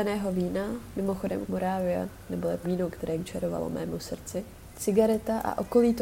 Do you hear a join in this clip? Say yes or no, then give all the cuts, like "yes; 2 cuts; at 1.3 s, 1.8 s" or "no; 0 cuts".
yes; 3 cuts; at 1.5 s, 2.6 s, 3.2 s